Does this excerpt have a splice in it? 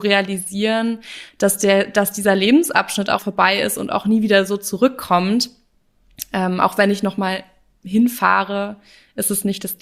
yes; 1 cut; at 3.2 s

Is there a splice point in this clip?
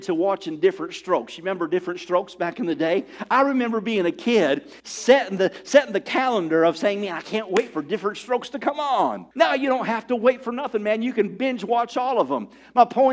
yes; 2 cuts; at 4.8 s, 9.3 s

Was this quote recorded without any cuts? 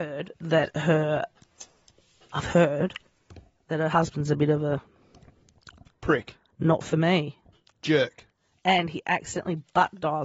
yes; 0 cuts

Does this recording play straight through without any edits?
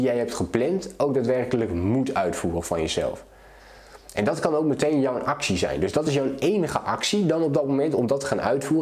yes; 0 cuts

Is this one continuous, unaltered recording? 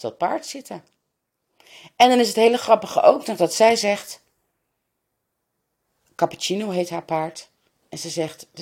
yes; 0 cuts

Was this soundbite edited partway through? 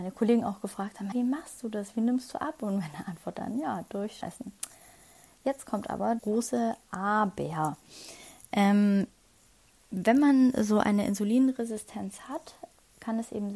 yes; 3 cuts; at 1.1 s, 4.2 s, 6.2 s

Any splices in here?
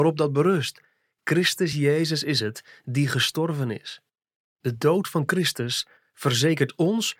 no; 0 cuts

